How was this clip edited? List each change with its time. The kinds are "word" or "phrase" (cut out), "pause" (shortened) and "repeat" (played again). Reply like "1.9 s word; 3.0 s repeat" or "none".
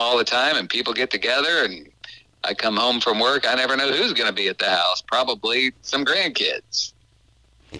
none